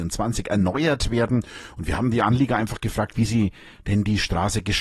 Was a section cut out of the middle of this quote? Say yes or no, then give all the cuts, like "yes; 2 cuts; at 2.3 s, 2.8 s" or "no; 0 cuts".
no; 0 cuts